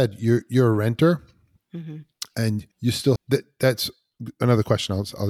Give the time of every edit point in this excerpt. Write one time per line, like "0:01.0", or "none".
0:02.7
0:03.2

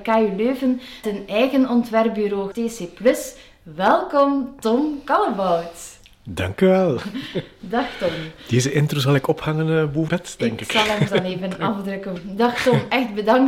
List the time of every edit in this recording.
0:01.0
0:02.5
0:10.1
0:11.1
0:12.2

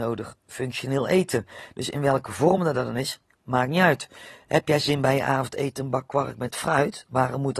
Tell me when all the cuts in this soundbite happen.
none

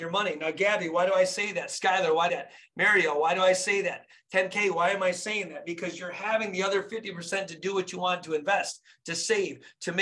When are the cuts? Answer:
0:02.3

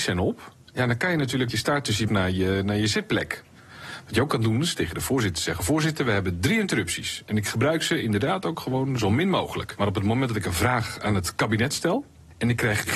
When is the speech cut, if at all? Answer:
0:01.5
0:02.1

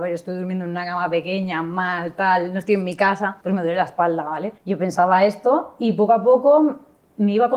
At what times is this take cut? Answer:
0:03.4
0:04.6

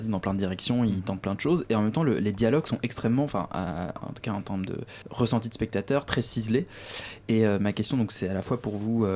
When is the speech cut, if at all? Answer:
0:05.0

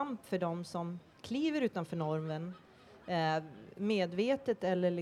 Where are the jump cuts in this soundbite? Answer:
none

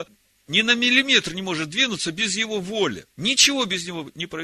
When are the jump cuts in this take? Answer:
0:03.1

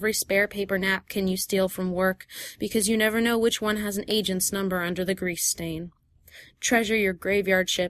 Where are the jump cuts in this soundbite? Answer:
none

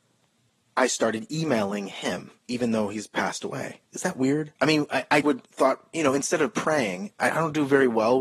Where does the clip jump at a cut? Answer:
0:02.4
0:03.9
0:04.6
0:05.2

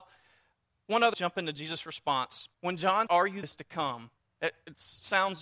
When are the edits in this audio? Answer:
0:01.1
0:02.5
0:03.1
0:03.4
0:04.2

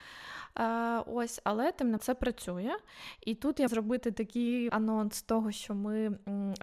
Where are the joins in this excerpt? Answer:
0:02.0
0:03.7
0:04.7

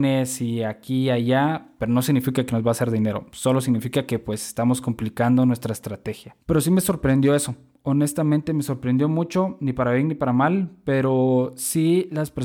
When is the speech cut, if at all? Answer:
0:06.4

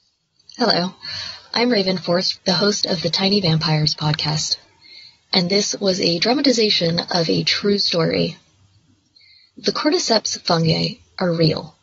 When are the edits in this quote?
0:02.4

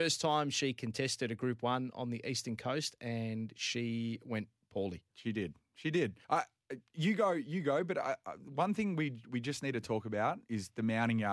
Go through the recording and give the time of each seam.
0:05.1
0:06.2

